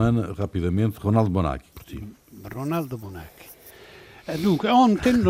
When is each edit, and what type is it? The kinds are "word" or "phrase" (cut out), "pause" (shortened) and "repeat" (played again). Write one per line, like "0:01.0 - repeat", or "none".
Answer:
0:01.7 - word